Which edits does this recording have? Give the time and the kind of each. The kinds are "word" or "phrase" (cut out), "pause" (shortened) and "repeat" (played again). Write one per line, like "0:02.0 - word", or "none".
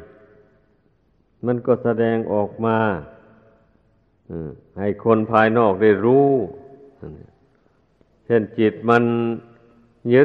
none